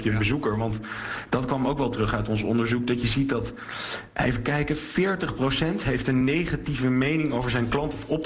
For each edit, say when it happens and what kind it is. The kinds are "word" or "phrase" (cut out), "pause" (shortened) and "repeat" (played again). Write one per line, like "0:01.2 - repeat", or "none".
none